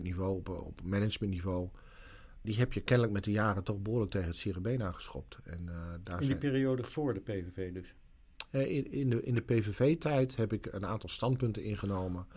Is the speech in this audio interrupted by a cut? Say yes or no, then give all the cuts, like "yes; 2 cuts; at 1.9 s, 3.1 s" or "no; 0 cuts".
yes; 1 cut; at 2.4 s